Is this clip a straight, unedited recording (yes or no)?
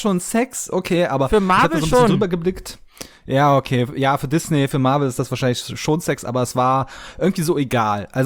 yes